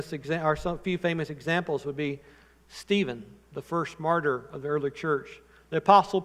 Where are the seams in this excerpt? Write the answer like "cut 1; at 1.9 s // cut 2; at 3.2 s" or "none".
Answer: none